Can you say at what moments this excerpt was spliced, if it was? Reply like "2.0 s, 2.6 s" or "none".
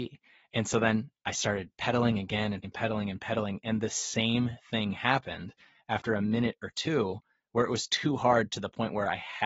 2.6 s